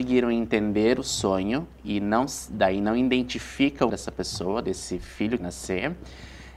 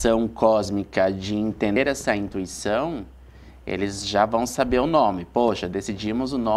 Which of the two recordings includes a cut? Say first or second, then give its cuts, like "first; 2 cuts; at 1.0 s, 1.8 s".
first; 2 cuts; at 3.9 s, 5.4 s